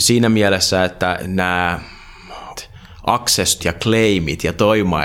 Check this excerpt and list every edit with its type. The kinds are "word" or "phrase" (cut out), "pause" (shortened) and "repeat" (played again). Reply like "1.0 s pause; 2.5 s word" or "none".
1.2 s word; 2.6 s word; 3.6 s word